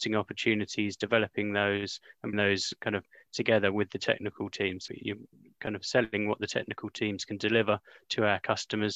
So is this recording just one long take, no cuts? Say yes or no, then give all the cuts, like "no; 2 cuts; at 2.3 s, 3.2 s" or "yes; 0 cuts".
no; 2 cuts; at 2.3 s, 4.9 s